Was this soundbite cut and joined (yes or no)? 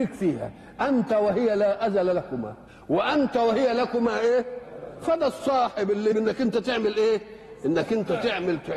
yes